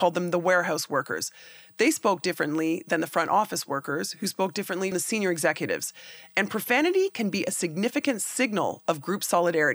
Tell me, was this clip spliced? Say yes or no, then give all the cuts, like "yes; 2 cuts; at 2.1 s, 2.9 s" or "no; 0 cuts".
yes; 1 cut; at 4.9 s